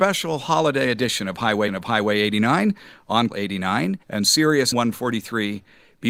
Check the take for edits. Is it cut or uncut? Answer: cut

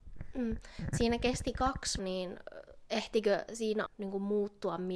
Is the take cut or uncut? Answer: cut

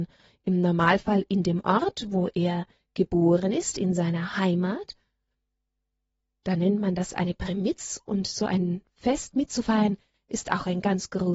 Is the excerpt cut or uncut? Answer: uncut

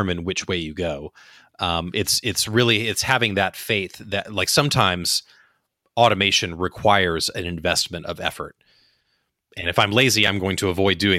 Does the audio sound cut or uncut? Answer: uncut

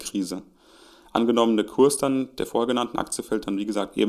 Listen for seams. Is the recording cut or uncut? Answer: uncut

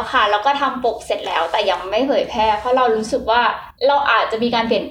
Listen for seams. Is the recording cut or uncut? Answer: cut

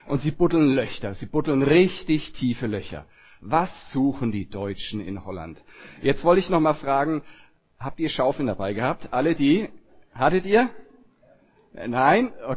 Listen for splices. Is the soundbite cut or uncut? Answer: uncut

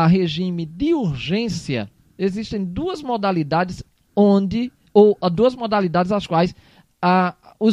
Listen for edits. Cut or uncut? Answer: uncut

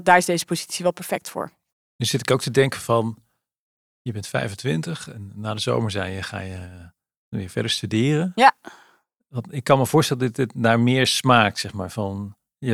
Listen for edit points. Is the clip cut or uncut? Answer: uncut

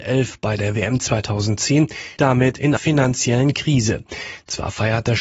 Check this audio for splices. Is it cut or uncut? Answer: cut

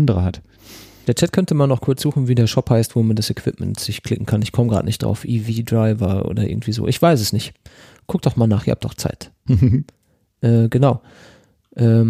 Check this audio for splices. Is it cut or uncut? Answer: uncut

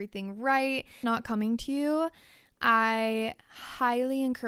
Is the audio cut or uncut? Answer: cut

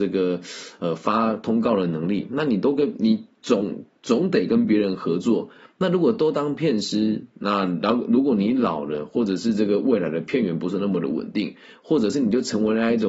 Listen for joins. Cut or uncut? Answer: uncut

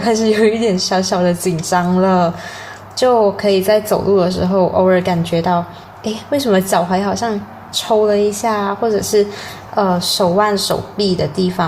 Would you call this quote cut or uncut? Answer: uncut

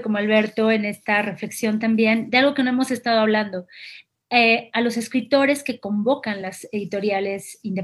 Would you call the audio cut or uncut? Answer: uncut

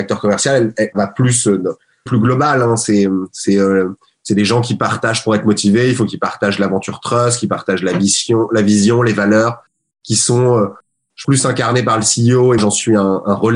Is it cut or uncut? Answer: cut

